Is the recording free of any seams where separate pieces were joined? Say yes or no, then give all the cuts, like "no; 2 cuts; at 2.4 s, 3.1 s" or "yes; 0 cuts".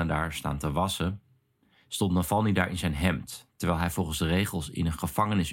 yes; 0 cuts